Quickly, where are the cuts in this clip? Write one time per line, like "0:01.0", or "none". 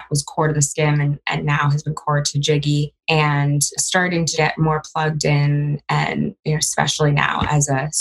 0:03.8
0:04.3